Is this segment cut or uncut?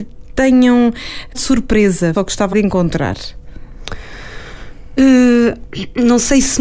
cut